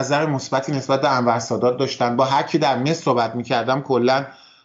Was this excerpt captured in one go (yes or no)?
yes